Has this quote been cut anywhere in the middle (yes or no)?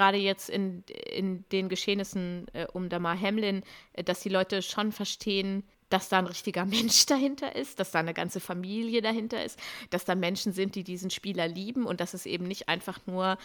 yes